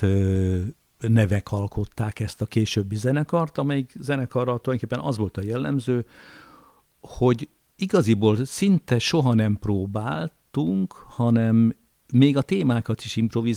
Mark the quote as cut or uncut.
uncut